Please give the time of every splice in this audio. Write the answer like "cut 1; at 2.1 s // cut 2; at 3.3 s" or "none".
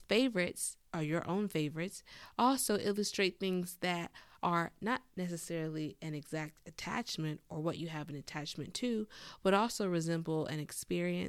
none